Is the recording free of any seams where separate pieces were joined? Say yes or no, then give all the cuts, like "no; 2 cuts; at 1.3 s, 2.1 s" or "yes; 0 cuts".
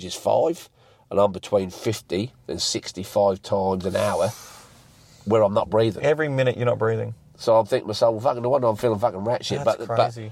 yes; 0 cuts